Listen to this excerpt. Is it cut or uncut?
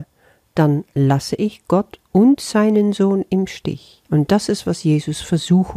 cut